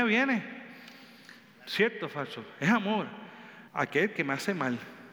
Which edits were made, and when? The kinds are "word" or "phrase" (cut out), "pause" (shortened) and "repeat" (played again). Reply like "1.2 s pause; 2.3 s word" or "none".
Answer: 3.7 s pause